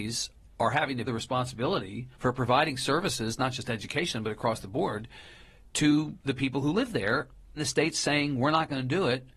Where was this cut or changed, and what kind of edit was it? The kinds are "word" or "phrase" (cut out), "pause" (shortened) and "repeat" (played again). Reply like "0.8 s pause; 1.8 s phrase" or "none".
1.1 s word; 2.1 s pause; 6.2 s pause; 7.6 s word